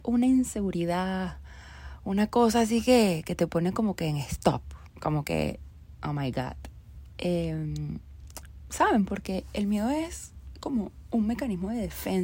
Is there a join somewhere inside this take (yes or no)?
no